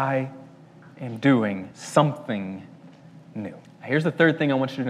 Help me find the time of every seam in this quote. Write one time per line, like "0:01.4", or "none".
0:01.7
0:03.6